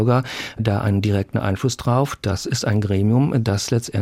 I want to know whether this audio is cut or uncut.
uncut